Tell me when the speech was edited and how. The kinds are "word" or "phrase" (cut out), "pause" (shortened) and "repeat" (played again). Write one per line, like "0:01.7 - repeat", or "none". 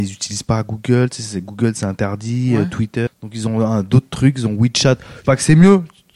0:03.1 - word
0:05.3 - word